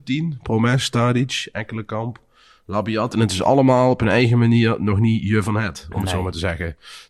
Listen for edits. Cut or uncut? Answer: uncut